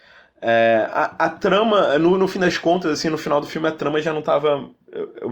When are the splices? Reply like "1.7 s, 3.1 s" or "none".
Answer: none